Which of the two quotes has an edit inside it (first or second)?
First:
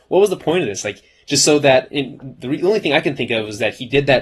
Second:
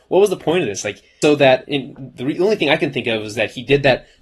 second